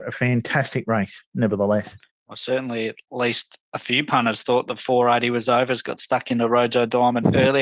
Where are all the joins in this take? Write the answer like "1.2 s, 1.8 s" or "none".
2.1 s